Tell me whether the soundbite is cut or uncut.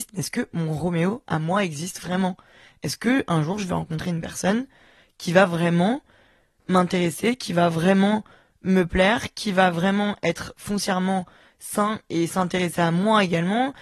uncut